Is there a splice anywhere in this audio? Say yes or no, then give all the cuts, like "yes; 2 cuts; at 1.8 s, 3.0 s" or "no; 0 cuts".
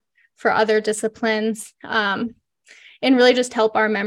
no; 0 cuts